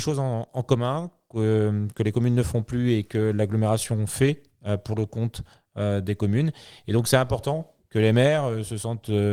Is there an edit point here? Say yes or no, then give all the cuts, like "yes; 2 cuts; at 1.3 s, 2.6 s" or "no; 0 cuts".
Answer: no; 0 cuts